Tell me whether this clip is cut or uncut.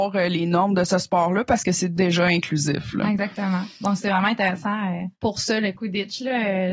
cut